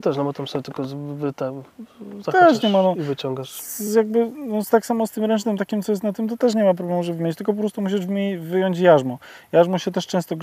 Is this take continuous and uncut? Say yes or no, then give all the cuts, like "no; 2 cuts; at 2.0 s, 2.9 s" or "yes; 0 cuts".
yes; 0 cuts